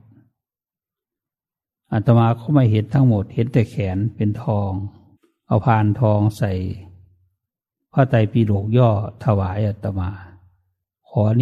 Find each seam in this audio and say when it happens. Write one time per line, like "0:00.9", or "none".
0:05.2